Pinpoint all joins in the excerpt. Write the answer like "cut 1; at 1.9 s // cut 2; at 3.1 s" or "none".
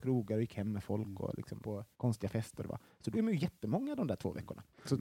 cut 1; at 1.6 s // cut 2; at 1.9 s // cut 3; at 2.6 s // cut 4; at 3.1 s